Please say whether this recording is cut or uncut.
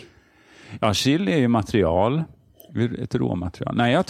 uncut